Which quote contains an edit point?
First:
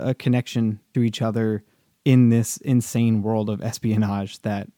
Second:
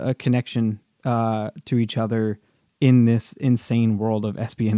first; 1 cut; at 0.9 s

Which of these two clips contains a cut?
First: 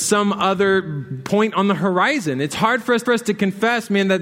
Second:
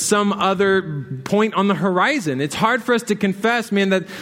first; 1 cut; at 3.1 s

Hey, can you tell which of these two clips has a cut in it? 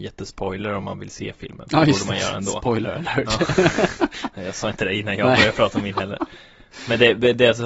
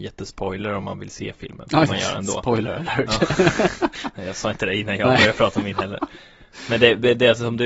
second; 1 cut; at 1.9 s

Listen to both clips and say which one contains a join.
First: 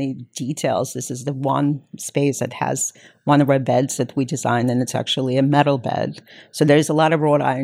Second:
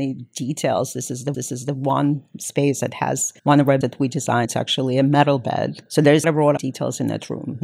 second; 7 cuts; at 1.3 s, 3.4 s, 3.8 s, 4.4 s, 5.9 s, 6.2 s, 6.6 s

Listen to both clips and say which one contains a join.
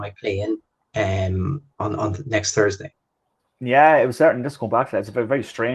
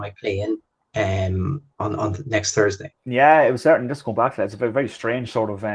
second; 1 cut; at 3.0 s

